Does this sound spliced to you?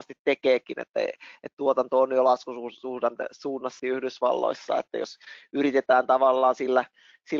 yes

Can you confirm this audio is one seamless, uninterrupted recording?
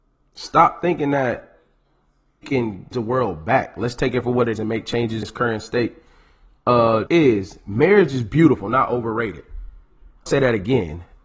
no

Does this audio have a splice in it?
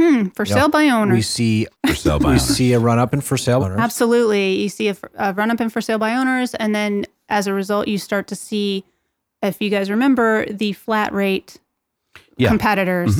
yes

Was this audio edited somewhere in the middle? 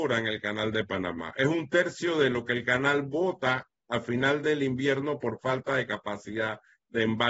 no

